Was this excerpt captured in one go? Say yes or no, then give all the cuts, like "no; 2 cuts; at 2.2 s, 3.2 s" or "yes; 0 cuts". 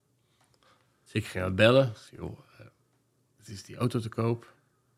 yes; 0 cuts